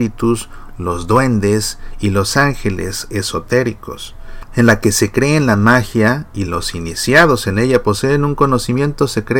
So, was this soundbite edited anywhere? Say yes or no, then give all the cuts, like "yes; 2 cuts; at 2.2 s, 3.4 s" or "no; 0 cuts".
no; 0 cuts